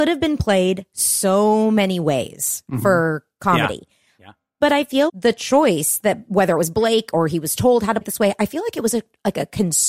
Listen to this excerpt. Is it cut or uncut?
cut